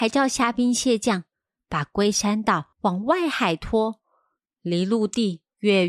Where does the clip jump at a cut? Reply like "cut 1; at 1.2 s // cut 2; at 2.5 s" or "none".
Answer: cut 1; at 2.7 s